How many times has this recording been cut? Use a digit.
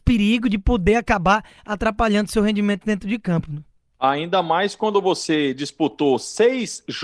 0